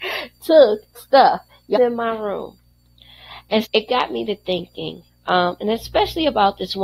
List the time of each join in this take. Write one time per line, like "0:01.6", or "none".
0:00.9
0:01.7
0:03.6